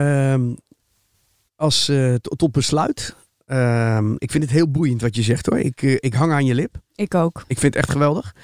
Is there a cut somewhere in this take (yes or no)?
no